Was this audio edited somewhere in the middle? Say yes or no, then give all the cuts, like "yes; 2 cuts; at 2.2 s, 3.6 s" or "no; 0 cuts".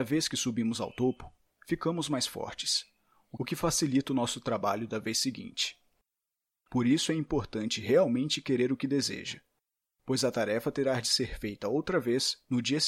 no; 0 cuts